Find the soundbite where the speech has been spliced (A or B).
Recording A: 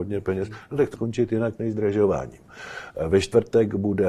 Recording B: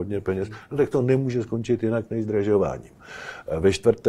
A